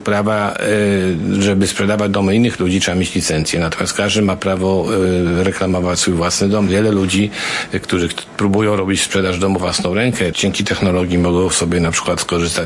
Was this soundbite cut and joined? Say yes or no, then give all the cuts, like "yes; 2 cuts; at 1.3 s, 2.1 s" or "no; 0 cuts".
yes; 3 cuts; at 6.7 s, 9.6 s, 10.3 s